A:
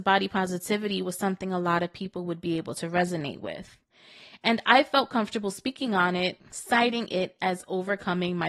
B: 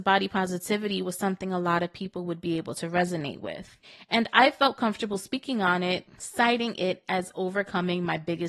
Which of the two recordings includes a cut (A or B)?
B